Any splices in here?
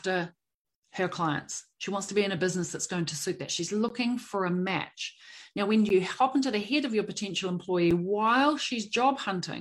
no; 0 cuts

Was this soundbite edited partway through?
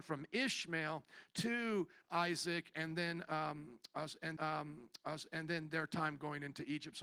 yes; 1 cut; at 4.4 s

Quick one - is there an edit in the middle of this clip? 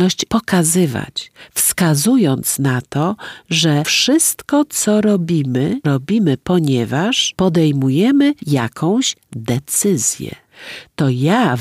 yes; 1 cut; at 8.4 s

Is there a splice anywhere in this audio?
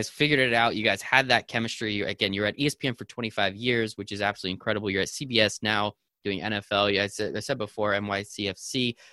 no; 0 cuts

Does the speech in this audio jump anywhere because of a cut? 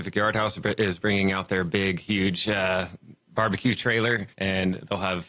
yes; 1 cut; at 4.3 s

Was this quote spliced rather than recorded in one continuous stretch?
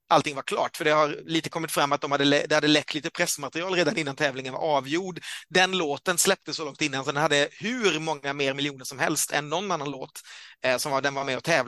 no; 0 cuts

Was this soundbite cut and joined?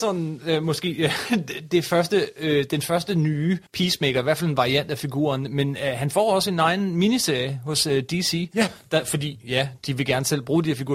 yes; 1 cut; at 3.7 s

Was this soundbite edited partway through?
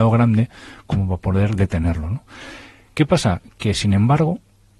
no; 0 cuts

